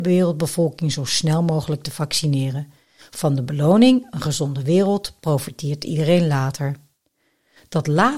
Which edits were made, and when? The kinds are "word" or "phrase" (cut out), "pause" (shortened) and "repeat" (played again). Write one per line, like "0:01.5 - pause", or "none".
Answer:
none